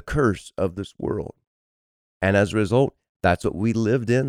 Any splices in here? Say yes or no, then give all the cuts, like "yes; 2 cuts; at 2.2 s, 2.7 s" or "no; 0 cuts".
no; 0 cuts